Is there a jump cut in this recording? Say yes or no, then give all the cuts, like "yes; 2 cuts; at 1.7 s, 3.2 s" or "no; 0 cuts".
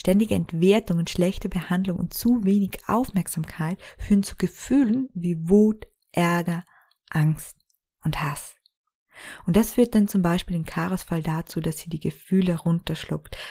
no; 0 cuts